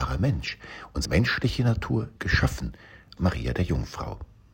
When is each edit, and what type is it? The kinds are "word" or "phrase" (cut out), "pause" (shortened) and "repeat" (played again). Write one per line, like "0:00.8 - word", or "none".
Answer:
0:01.0 - word
0:02.2 - word
0:03.2 - word